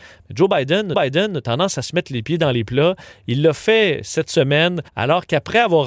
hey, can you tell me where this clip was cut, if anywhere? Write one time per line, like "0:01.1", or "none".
0:00.9
0:04.9